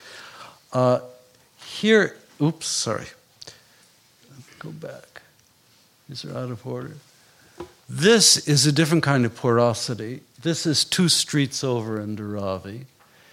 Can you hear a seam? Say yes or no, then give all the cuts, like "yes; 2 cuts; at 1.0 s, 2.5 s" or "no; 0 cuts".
no; 0 cuts